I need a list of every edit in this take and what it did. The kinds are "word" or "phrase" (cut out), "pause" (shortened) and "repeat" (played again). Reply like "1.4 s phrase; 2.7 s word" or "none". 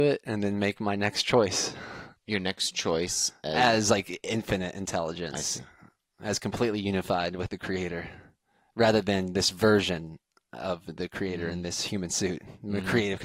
2.2 s pause